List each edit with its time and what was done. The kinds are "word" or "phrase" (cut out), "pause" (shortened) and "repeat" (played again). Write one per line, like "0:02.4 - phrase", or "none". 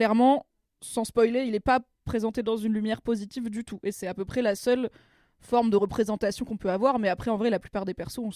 none